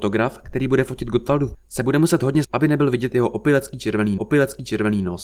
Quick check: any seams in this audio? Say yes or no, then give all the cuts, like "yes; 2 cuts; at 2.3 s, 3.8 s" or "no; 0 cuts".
yes; 3 cuts; at 1.5 s, 2.4 s, 4.2 s